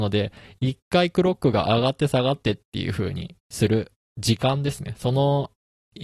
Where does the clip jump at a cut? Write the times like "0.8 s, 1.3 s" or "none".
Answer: 3.4 s